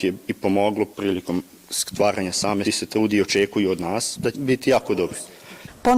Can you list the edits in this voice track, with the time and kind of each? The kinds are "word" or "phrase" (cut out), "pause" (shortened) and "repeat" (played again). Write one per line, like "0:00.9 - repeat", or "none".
0:00.9 - pause
0:02.6 - phrase
0:04.3 - word